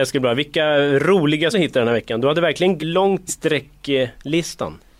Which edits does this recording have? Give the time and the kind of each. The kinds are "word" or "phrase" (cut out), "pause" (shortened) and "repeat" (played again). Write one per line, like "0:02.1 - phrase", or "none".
0:01.5 - word
0:02.8 - word
0:03.3 - phrase